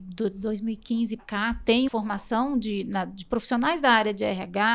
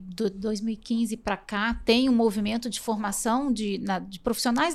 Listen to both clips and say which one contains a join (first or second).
first